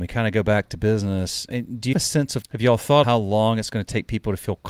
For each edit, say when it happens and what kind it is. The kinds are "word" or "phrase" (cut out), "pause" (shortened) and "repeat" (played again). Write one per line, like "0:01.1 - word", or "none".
0:01.5 - word
0:01.9 - word
0:02.4 - word
0:03.0 - word